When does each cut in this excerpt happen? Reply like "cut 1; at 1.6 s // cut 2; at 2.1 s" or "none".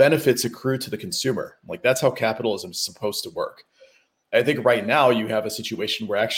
none